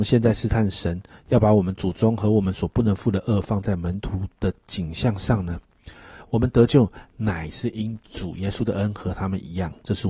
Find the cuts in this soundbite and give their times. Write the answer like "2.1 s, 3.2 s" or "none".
none